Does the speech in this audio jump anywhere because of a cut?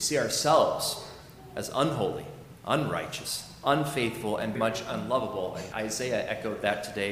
yes; 2 cuts; at 4.5 s, 5.7 s

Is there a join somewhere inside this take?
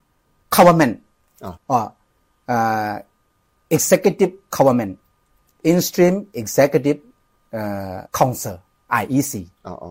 yes; 2 cuts; at 1.6 s, 8.1 s

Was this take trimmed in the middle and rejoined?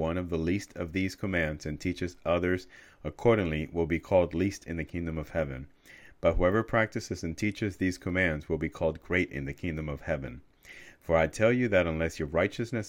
no; 0 cuts

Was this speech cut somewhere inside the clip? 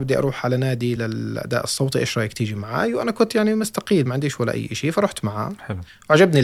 no; 0 cuts

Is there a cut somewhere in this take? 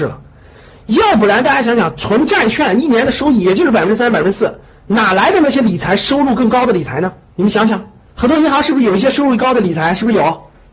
yes; 2 cuts; at 7.3 s, 8.1 s

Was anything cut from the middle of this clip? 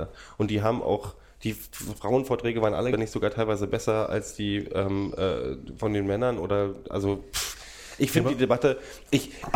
yes; 1 cut; at 2.9 s

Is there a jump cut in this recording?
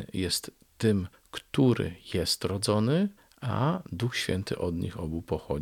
yes; 2 cuts; at 1.1 s, 3.2 s

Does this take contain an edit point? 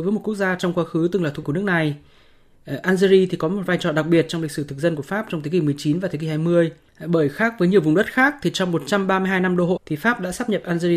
yes; 3 cuts; at 1.4 s, 6.9 s, 9.8 s

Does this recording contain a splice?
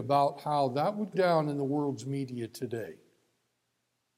yes; 1 cut; at 1.1 s

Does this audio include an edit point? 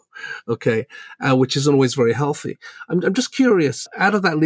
no; 0 cuts

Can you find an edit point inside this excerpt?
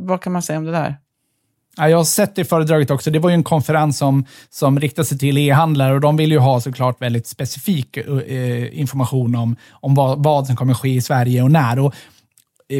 no; 0 cuts

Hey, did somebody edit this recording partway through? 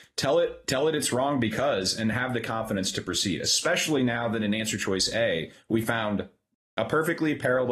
no; 0 cuts

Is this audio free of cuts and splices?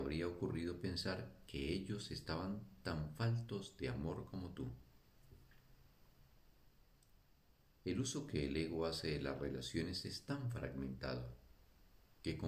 yes; 0 cuts

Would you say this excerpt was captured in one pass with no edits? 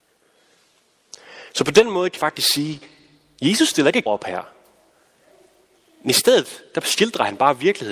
no; 2 cuts; at 2.2 s, 4.1 s

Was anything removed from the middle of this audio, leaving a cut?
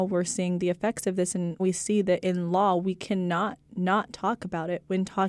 yes; 1 cut; at 1.6 s

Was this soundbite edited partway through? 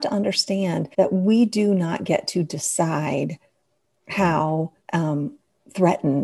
yes; 2 cuts; at 0.9 s, 4.8 s

